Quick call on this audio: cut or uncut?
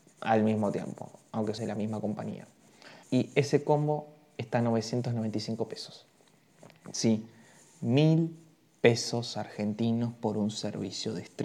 cut